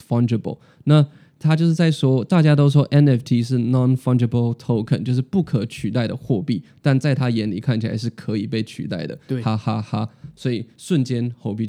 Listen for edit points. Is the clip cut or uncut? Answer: uncut